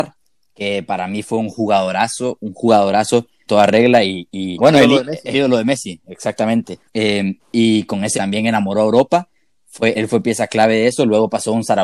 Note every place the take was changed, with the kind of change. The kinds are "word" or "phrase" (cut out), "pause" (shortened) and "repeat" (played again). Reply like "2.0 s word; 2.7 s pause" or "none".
3.5 s word; 4.6 s word; 5.3 s word; 6.9 s pause; 8.1 s phrase; 9.9 s word